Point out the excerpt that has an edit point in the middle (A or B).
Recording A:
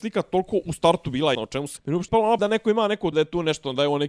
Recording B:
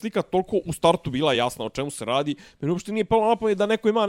A